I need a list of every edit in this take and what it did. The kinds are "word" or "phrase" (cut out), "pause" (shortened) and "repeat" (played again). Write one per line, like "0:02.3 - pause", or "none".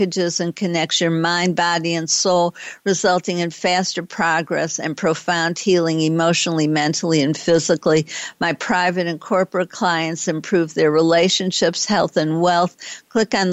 none